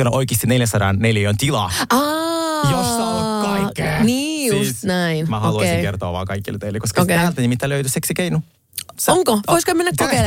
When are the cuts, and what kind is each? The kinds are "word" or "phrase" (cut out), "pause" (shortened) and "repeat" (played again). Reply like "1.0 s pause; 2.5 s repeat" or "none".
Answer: none